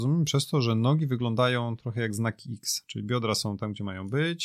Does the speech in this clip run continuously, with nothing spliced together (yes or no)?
yes